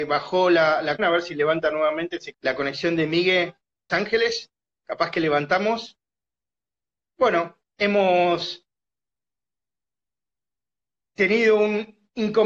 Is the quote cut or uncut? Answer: cut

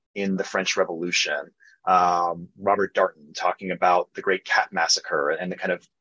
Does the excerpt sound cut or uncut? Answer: uncut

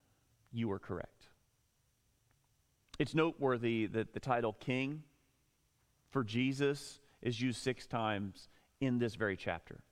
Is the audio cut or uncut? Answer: uncut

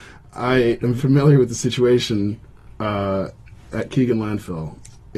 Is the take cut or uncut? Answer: cut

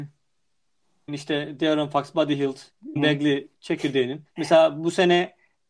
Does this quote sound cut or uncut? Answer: cut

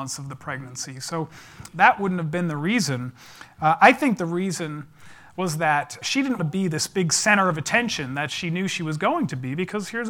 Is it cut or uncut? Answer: cut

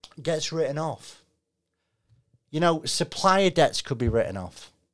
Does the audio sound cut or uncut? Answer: uncut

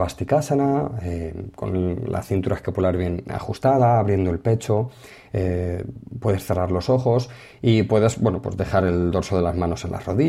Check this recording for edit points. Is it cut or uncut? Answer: uncut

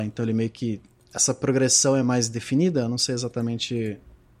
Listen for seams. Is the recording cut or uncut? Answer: uncut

